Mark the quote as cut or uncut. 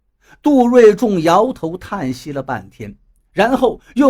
uncut